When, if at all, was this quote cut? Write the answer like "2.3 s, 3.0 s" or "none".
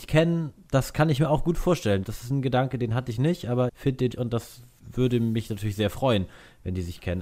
3.7 s, 4.1 s